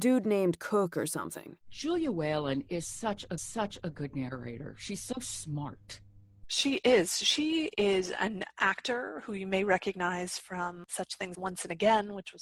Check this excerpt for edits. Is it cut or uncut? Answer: cut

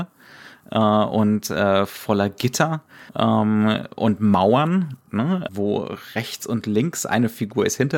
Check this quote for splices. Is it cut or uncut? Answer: cut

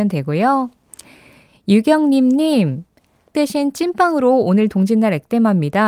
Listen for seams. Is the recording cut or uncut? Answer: cut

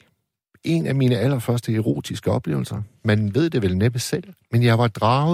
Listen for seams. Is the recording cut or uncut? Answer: uncut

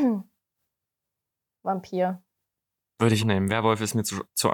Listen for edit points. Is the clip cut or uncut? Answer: cut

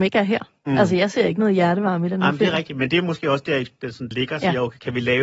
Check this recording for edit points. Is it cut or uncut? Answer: cut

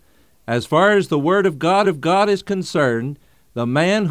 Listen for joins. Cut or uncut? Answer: cut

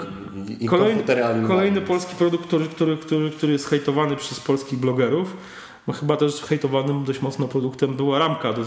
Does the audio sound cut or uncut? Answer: uncut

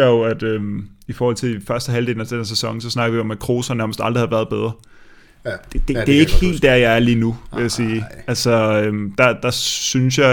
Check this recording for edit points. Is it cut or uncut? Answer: uncut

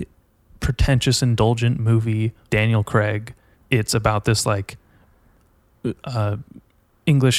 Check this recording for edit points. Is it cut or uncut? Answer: cut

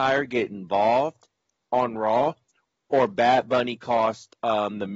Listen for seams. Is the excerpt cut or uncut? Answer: uncut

